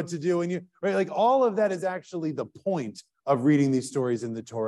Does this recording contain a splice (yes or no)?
no